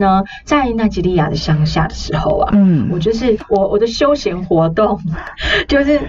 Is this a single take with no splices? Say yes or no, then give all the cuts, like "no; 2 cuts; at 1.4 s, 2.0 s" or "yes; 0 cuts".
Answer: yes; 0 cuts